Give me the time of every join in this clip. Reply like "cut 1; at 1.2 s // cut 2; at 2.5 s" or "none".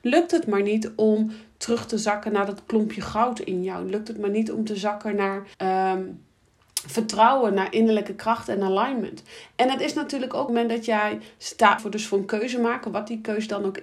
cut 1; at 5.5 s // cut 2; at 10.5 s // cut 3; at 11.8 s